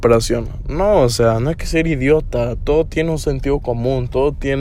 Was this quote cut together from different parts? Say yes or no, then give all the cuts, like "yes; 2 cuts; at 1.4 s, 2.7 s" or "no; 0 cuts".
no; 0 cuts